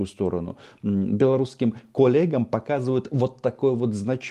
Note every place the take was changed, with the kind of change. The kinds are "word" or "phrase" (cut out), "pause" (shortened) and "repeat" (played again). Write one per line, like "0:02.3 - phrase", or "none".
none